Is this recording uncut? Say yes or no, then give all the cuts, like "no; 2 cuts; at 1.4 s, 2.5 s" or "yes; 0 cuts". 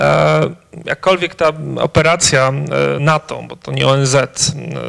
yes; 0 cuts